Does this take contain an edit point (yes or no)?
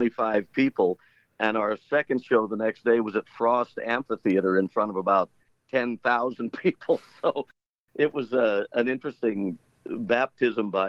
no